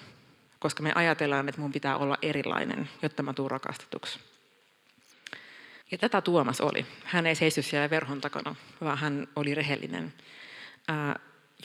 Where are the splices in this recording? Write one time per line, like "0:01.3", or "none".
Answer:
0:05.8